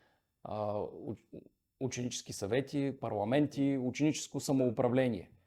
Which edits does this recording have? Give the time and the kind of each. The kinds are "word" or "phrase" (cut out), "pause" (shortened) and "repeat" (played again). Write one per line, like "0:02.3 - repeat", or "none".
none